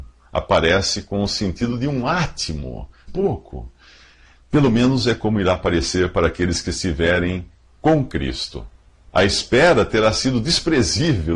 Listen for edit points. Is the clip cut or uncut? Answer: cut